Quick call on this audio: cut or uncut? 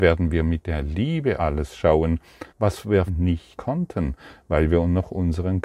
cut